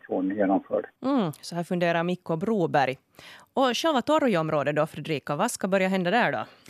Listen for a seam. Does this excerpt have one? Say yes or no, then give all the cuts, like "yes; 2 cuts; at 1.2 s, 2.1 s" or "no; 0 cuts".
yes; 1 cut; at 1.0 s